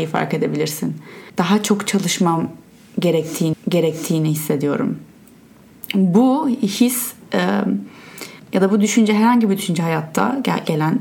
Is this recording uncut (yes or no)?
no